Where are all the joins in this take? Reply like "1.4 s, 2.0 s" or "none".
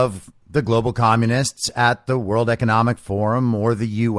none

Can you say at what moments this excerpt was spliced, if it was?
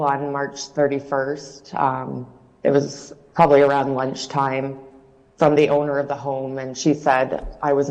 none

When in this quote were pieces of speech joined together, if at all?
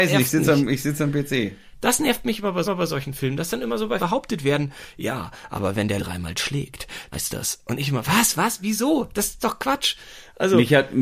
2.6 s, 4.0 s, 6.0 s, 7.1 s, 8.3 s, 9.4 s

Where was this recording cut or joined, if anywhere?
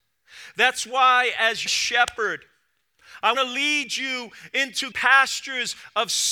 1.7 s, 3.3 s, 4.9 s

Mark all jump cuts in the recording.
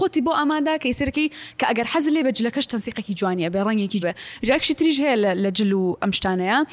4.0 s

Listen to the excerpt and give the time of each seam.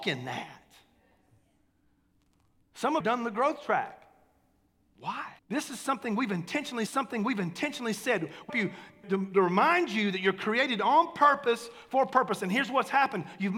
3.0 s, 5.4 s, 6.9 s, 8.5 s, 9.0 s

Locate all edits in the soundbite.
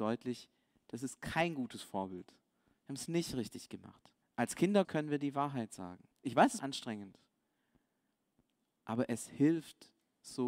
4.2 s, 4.8 s, 6.1 s, 6.6 s

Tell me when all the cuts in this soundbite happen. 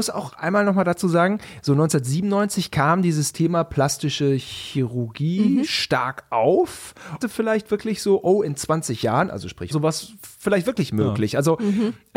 7.2 s, 9.7 s

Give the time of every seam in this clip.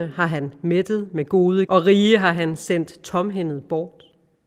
1.7 s

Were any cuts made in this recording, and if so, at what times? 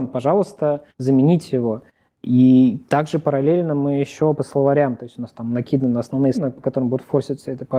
0.9 s, 4.4 s, 6.3 s

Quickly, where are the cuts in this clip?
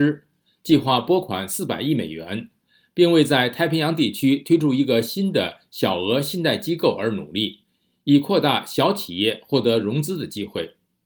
none

